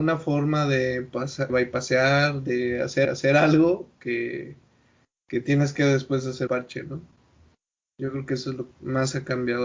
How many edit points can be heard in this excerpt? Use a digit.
4